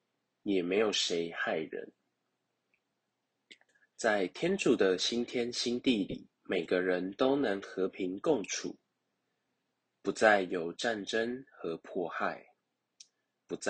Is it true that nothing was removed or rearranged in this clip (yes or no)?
no